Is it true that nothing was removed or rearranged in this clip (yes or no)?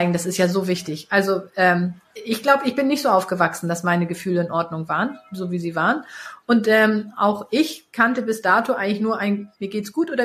yes